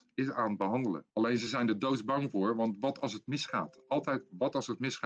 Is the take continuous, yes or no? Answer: yes